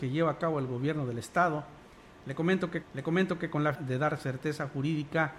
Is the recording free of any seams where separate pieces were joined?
no; 2 cuts; at 2.8 s, 3.7 s

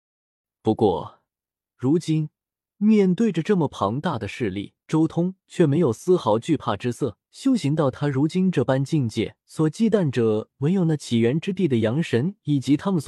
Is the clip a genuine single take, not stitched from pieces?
no; 3 cuts; at 4.8 s, 7.3 s, 9.4 s

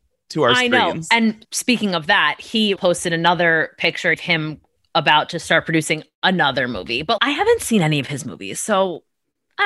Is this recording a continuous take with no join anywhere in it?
no; 4 cuts; at 1.4 s, 2.8 s, 4.1 s, 7.2 s

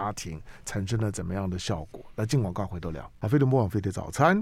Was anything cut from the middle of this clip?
yes; 1 cut; at 3.1 s

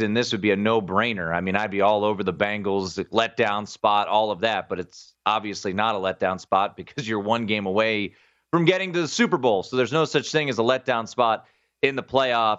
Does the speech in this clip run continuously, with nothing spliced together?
yes; 0 cuts

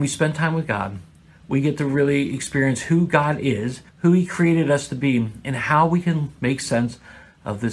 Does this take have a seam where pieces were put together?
yes; 1 cut; at 3.9 s

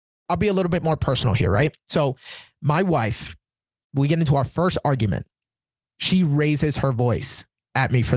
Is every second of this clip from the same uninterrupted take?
yes; 0 cuts

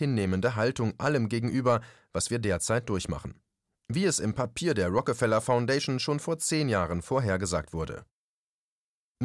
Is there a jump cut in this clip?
no; 0 cuts

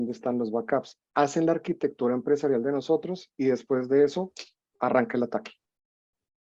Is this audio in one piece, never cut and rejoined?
yes; 0 cuts

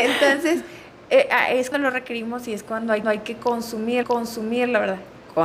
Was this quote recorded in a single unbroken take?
no; 3 cuts; at 1.7 s, 3.0 s, 4.0 s

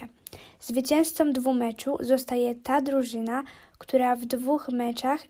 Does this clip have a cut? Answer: no; 0 cuts

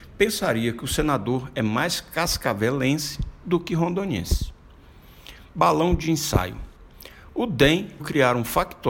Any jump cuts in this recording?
yes; 1 cut; at 8.0 s

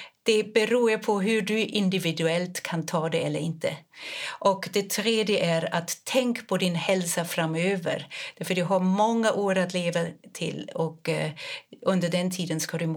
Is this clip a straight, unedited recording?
yes; 0 cuts

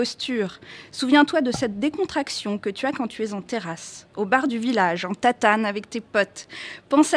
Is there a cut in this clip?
no; 0 cuts

